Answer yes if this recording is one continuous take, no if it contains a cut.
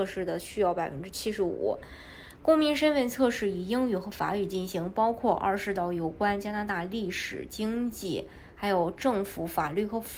no